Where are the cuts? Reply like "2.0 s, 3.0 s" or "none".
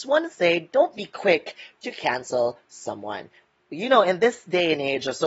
none